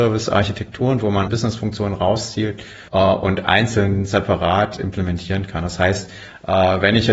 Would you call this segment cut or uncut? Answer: cut